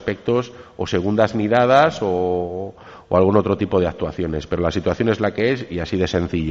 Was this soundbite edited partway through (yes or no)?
no